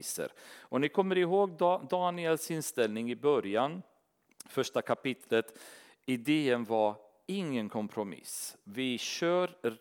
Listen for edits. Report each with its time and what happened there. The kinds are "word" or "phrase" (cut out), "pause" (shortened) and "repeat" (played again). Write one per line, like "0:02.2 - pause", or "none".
none